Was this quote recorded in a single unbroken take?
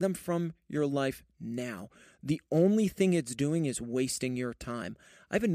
yes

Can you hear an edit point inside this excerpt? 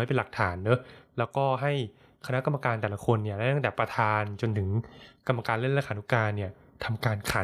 no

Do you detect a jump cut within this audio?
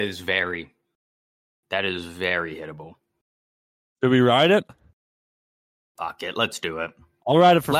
no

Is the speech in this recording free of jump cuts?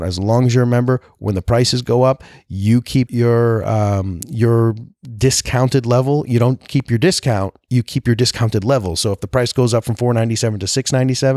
no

